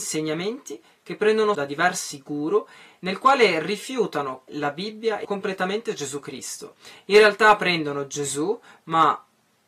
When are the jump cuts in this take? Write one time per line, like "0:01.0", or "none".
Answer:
0:01.5
0:04.5
0:05.2